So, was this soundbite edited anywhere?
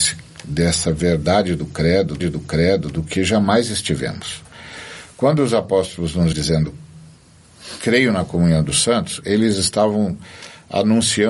yes; 2 cuts; at 2.2 s, 6.3 s

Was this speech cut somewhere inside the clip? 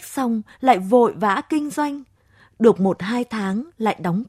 no; 0 cuts

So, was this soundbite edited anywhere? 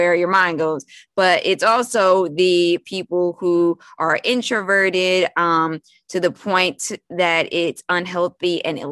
no; 0 cuts

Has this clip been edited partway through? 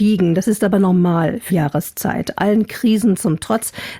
yes; 1 cut; at 1.5 s

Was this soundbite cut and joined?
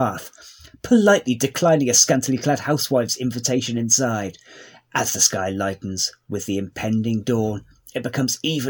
no; 0 cuts

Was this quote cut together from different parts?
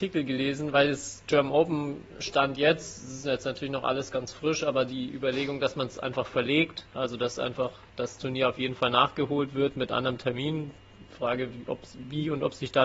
no; 0 cuts

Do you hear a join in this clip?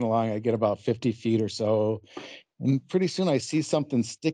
no; 0 cuts

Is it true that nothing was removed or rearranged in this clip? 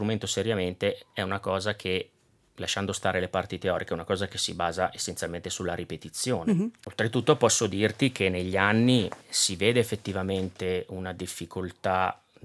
no; 1 cut; at 9.2 s

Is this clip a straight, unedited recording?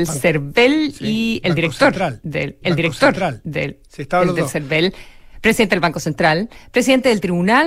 no; 1 cut; at 2.6 s

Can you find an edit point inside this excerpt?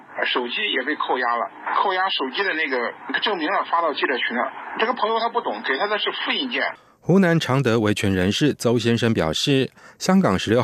no; 0 cuts

